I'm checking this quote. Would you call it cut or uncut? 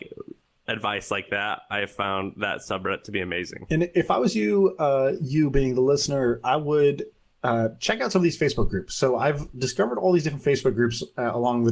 uncut